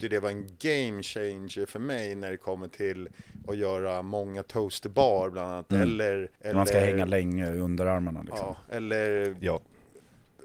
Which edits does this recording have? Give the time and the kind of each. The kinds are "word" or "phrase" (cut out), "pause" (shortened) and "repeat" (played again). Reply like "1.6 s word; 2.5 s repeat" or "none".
6.4 s pause